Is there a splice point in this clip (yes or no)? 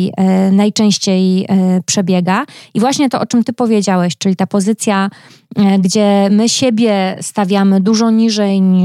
no